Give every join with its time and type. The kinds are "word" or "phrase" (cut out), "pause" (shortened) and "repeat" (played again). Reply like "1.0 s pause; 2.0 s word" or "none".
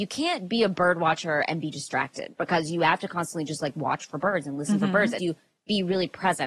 5.2 s phrase